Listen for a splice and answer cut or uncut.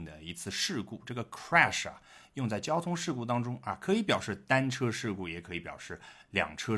uncut